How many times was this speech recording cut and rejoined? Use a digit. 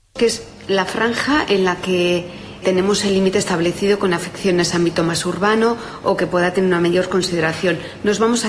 1